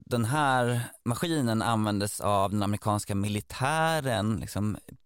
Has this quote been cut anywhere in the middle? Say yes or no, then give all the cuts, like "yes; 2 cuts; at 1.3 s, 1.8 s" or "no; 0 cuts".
no; 0 cuts